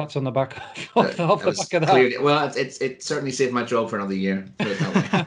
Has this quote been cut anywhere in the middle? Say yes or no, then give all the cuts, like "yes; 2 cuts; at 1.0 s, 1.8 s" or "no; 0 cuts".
no; 0 cuts